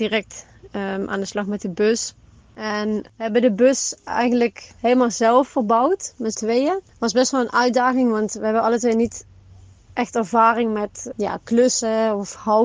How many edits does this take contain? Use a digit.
2